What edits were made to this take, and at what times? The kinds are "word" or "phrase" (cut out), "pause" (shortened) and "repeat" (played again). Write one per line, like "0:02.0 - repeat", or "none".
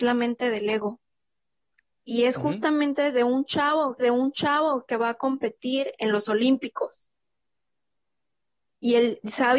0:04.0 - repeat